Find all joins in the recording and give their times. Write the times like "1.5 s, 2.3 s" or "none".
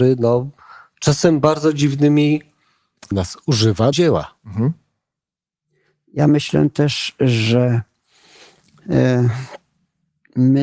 3.1 s, 3.9 s